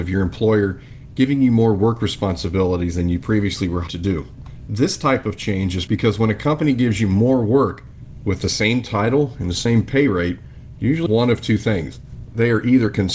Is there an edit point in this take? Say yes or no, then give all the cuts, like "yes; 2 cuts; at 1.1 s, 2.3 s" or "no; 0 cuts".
yes; 3 cuts; at 3.9 s, 5.9 s, 11.1 s